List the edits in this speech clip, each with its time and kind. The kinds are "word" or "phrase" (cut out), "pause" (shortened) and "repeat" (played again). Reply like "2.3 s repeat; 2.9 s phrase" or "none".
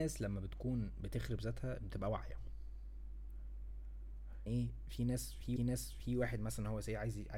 4.5 s word; 5.6 s repeat